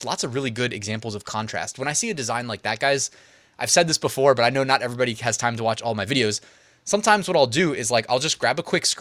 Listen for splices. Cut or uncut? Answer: uncut